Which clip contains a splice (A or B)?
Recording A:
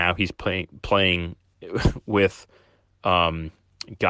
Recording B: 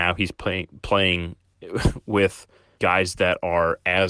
B